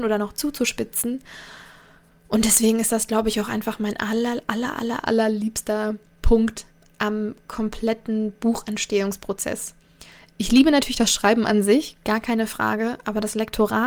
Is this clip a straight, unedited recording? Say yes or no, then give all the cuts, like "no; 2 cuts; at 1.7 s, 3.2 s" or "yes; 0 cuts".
yes; 0 cuts